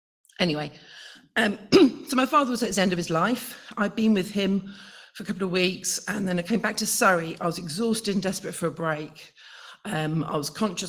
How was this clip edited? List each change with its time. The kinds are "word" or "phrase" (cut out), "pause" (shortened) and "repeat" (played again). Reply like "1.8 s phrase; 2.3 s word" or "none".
none